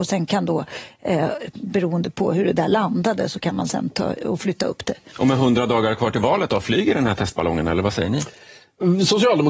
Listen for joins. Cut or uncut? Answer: uncut